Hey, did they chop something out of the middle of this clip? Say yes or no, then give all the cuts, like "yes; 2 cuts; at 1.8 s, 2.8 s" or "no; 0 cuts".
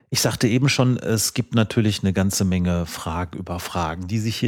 no; 0 cuts